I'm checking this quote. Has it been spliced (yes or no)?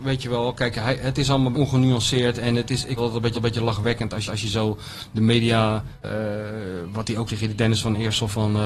yes